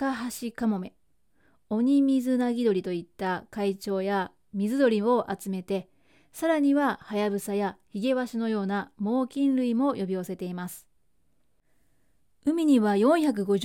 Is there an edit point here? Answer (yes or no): no